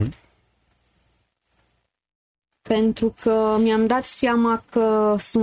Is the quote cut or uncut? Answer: uncut